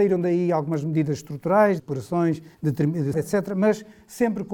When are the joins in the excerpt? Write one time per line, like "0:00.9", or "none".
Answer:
0:01.8
0:02.5
0:03.1